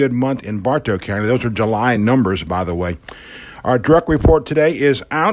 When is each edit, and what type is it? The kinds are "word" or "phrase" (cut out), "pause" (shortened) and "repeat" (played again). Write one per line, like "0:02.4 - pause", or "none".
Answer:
none